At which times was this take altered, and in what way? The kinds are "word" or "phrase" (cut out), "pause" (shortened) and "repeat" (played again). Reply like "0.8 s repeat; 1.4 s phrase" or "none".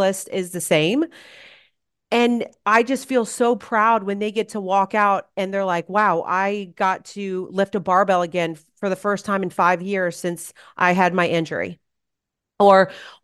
none